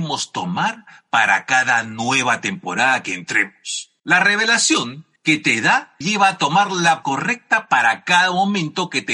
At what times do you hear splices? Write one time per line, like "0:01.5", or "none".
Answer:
0:04.0
0:05.2
0:06.0
0:07.0